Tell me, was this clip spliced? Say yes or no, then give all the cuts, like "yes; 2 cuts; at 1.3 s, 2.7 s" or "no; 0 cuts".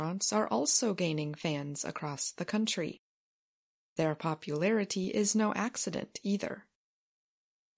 no; 0 cuts